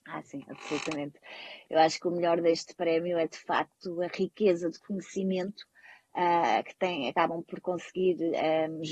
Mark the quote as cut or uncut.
uncut